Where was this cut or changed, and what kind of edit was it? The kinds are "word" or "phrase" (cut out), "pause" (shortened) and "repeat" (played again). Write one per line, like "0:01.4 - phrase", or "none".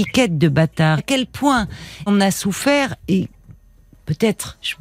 0:01.0 - word
0:02.1 - word